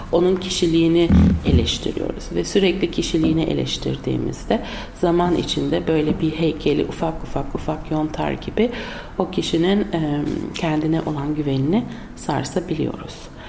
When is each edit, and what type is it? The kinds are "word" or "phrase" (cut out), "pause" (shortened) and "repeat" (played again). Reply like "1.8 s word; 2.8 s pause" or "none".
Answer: none